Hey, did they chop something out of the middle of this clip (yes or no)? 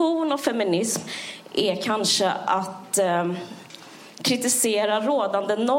no